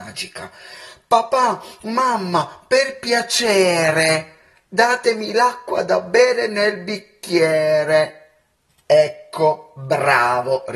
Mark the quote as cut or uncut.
uncut